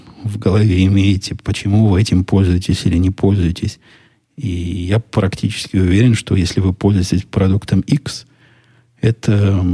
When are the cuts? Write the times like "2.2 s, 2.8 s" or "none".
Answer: none